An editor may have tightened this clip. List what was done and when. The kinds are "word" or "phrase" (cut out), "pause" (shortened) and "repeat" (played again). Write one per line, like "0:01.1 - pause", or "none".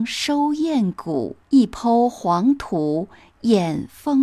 0:01.4 - pause